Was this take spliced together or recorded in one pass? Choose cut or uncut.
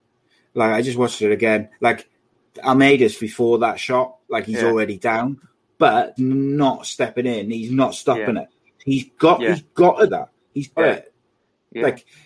cut